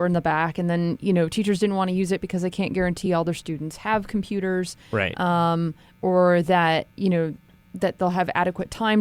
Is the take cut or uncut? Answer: uncut